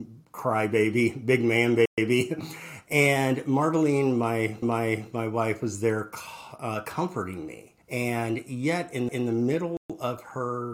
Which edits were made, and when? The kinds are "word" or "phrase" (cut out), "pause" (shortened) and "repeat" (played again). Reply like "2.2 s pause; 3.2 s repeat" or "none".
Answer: 4.6 s repeat; 7.8 s pause; 9.1 s repeat